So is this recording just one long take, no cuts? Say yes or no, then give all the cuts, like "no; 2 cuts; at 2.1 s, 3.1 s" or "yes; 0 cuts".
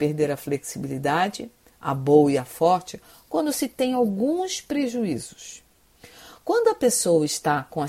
yes; 0 cuts